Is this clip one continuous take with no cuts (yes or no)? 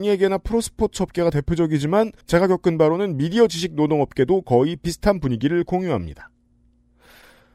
no